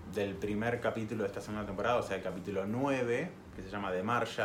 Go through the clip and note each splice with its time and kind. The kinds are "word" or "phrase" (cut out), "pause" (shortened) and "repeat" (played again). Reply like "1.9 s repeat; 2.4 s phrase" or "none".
none